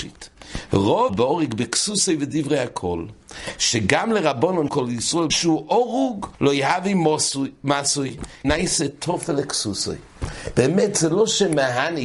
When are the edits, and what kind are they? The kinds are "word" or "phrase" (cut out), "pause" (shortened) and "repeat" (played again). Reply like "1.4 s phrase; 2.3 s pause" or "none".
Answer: 1.1 s word; 4.7 s word; 5.3 s phrase; 6.3 s pause; 8.4 s word